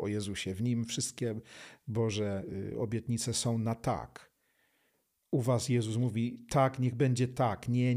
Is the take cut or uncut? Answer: uncut